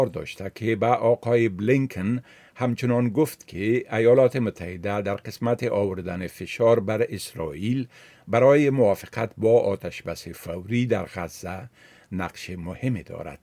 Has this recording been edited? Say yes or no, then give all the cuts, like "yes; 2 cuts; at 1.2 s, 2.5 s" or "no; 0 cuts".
no; 0 cuts